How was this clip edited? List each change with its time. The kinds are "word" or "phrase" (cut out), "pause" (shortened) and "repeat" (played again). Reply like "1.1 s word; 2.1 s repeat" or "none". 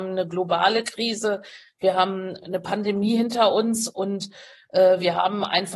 none